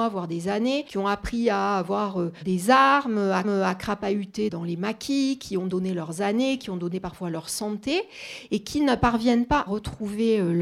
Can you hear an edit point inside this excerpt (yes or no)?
yes